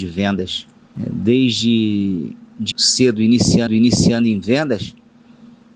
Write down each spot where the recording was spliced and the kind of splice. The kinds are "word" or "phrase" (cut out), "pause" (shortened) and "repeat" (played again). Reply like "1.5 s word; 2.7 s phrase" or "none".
2.7 s word; 3.7 s repeat

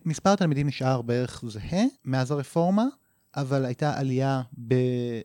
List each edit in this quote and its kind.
1.9 s pause

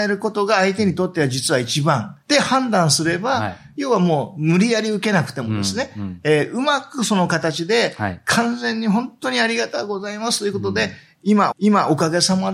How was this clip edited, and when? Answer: 2.2 s pause; 11.5 s repeat

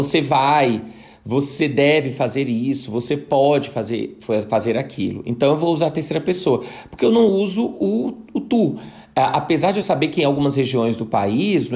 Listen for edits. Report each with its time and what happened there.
none

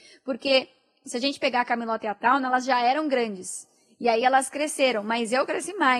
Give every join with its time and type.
none

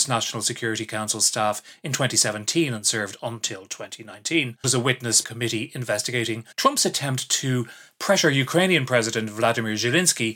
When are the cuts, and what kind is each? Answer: 4.6 s phrase; 5.2 s phrase; 6.5 s pause

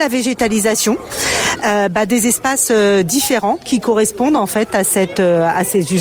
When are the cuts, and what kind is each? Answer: none

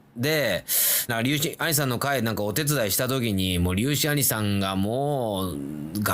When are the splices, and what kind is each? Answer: 1.1 s phrase

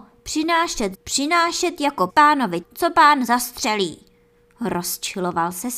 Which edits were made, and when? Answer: 0.9 s word; 2.1 s word; 2.6 s word

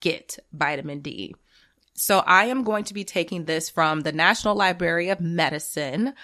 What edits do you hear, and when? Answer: none

